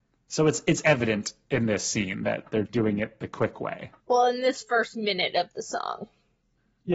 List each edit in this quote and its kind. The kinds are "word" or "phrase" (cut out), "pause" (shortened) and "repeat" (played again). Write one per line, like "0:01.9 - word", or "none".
0:02.7 - word
0:04.0 - pause